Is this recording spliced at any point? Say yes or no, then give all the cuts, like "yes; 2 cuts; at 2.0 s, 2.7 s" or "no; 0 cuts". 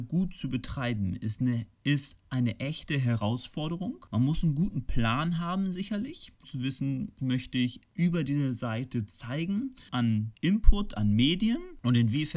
yes; 2 cuts; at 6.4 s, 7.2 s